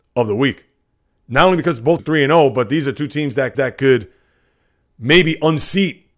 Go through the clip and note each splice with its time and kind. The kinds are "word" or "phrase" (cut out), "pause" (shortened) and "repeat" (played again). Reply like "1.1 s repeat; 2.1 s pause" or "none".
2.0 s word; 3.5 s repeat